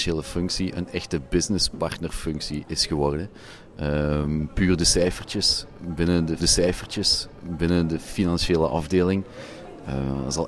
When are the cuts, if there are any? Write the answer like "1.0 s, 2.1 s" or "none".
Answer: 6.4 s